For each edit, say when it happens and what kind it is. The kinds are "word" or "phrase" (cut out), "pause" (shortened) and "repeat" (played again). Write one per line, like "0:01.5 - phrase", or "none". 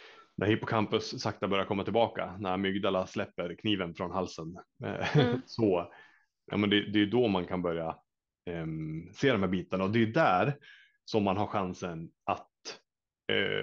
none

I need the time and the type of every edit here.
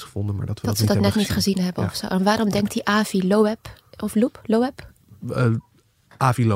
none

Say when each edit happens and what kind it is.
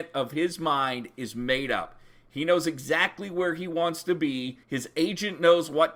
0:04.6 - pause

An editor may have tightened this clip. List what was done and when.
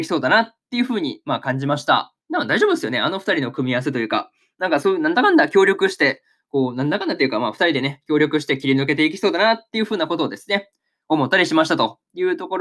0:02.2 - pause

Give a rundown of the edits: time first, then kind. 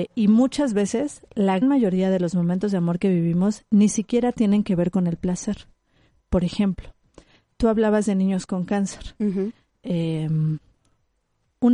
0:01.6 - word
0:07.5 - word

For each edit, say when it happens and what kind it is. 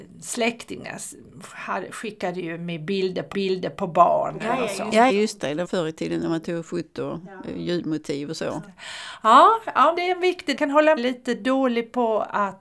0:03.3 - repeat
0:05.1 - word
0:05.6 - word
0:10.0 - word
0:10.6 - phrase
0:11.0 - phrase

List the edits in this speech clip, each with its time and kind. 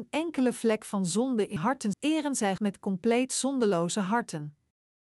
0:01.6 - word
0:01.9 - word
0:02.6 - word

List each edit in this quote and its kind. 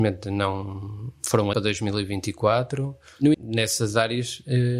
0:01.5 - phrase
0:03.3 - word

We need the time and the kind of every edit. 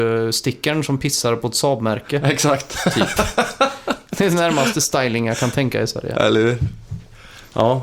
none

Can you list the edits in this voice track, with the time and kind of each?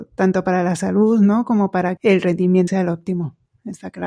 0:02.0 - word
0:02.7 - word

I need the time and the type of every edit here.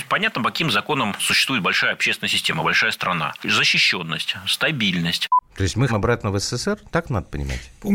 0:05.5 - pause
0:05.9 - phrase

